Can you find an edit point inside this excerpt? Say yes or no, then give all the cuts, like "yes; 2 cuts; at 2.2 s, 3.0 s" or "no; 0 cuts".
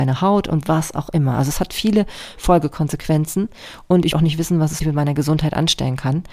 yes; 2 cuts; at 4.1 s, 4.8 s